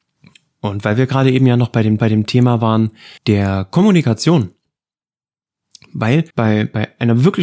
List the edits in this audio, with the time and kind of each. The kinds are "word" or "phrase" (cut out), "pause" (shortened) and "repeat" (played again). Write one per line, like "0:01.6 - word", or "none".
0:02.0 - repeat
0:03.2 - pause
0:06.3 - pause